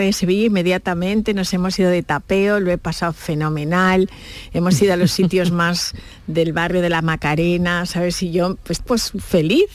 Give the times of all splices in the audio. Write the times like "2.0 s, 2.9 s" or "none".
8.8 s

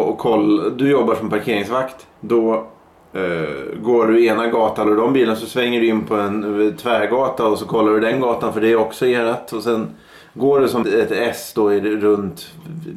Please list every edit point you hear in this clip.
2.1 s, 4.8 s, 10.8 s

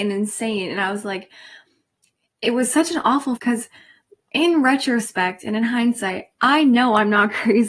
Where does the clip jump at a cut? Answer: 3.4 s

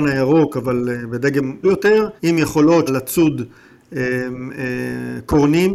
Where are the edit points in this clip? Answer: 1.6 s, 2.2 s, 2.9 s

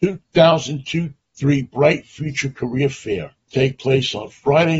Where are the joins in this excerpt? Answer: 3.5 s

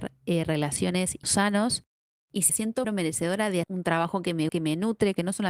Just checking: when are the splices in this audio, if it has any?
1.2 s, 2.5 s, 2.8 s, 3.6 s, 4.5 s

